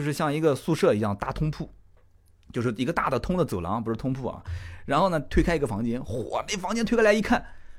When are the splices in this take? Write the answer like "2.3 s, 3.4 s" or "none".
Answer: none